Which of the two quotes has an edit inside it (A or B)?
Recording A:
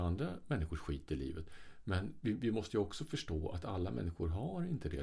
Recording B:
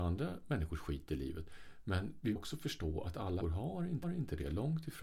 B